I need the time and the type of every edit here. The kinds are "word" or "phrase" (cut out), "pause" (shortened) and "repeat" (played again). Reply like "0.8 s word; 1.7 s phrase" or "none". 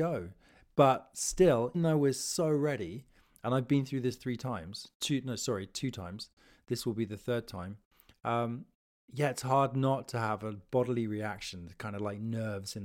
1.7 s word